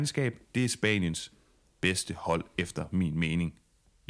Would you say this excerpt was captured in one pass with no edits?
yes; 0 cuts

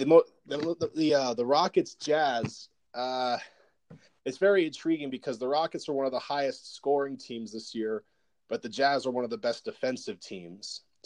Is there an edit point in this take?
no; 0 cuts

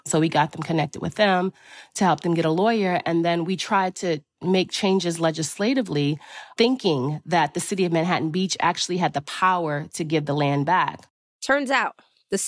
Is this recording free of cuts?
yes; 0 cuts

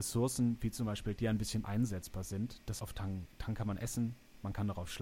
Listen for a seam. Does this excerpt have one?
yes; 3 cuts; at 1.2 s, 1.6 s, 2.8 s

